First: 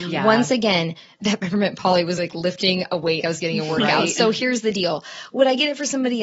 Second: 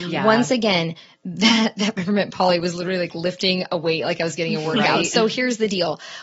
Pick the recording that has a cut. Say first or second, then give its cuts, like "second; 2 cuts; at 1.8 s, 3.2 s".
first; 3 cuts; at 1.2 s, 2.2 s, 3.2 s